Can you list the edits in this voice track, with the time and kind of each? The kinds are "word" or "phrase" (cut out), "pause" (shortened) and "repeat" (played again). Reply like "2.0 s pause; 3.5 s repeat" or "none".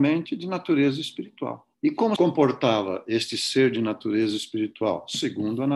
1.7 s pause; 2.2 s word